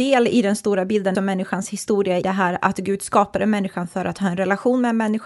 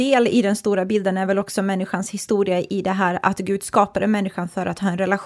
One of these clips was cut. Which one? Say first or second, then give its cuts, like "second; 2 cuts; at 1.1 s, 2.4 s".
first; 2 cuts; at 1.1 s, 2.2 s